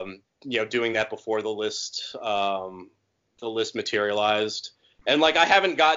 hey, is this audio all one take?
yes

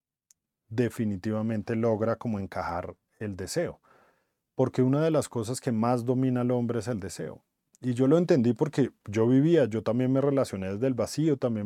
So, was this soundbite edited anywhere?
no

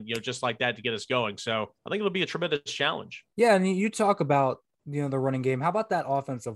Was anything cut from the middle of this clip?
yes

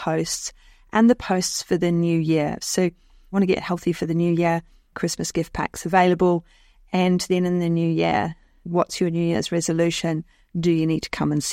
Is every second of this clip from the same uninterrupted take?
yes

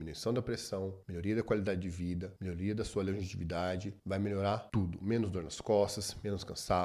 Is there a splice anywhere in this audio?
no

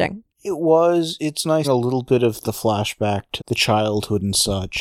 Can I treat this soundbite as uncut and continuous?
no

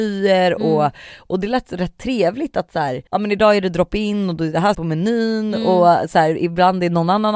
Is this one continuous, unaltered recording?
no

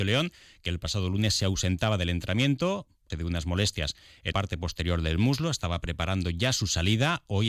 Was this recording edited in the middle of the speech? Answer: yes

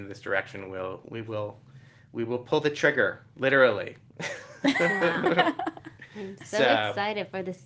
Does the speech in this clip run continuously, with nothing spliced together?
yes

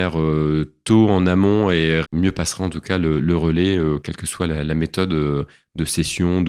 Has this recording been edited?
yes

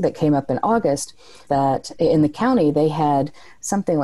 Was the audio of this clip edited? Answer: yes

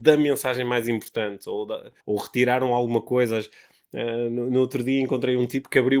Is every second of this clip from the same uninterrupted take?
no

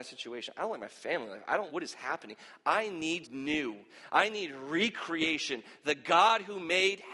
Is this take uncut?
no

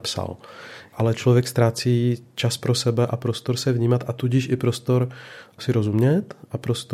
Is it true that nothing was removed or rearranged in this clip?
yes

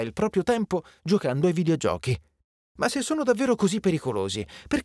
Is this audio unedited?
yes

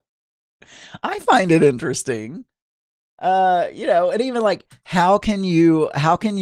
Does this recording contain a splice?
no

